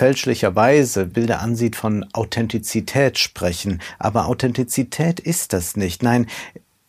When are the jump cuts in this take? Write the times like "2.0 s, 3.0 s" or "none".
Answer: 1.1 s